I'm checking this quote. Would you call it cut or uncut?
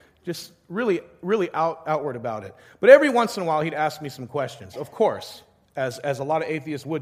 uncut